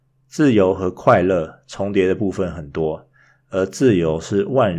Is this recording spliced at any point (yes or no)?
no